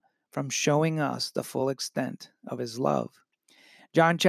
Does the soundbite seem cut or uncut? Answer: uncut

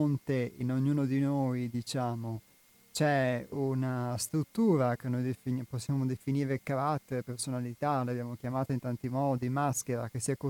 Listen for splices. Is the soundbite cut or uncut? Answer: uncut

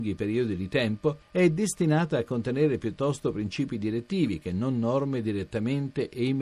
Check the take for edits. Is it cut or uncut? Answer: uncut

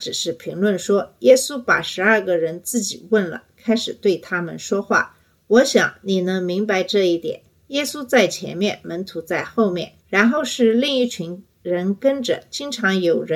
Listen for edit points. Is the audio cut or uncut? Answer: cut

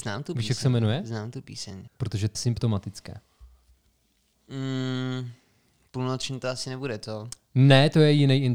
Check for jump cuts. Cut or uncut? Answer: cut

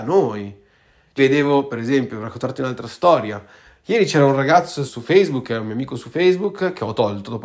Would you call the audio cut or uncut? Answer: cut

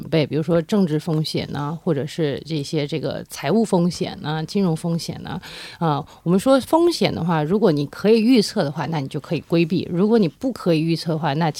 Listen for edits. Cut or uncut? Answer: uncut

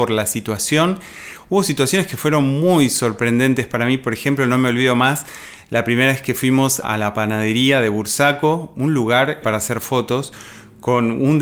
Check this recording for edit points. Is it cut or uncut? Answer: cut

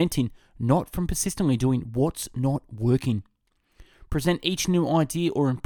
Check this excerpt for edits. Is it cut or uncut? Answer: uncut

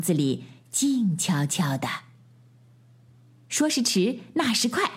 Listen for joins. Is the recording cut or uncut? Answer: uncut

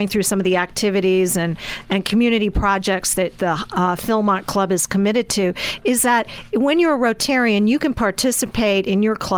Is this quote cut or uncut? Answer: uncut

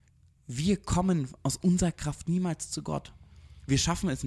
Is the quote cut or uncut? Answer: uncut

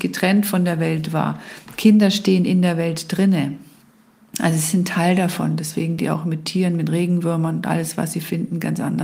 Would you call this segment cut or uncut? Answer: cut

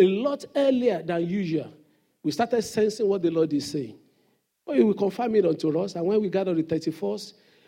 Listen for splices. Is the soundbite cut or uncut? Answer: uncut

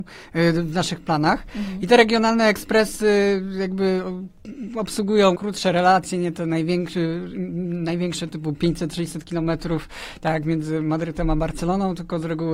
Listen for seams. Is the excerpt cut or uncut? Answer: cut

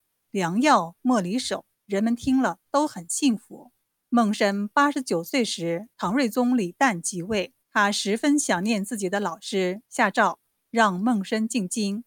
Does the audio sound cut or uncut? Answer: cut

